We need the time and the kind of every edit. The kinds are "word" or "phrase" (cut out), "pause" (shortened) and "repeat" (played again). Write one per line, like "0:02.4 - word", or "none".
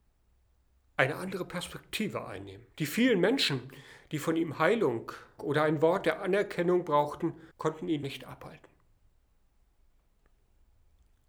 0:02.7 - pause
0:05.4 - word
0:07.5 - pause
0:08.0 - word